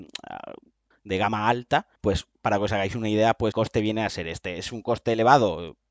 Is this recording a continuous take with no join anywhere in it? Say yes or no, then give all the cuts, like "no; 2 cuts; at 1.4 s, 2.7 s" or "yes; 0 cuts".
no; 3 cuts; at 0.9 s, 2.0 s, 3.5 s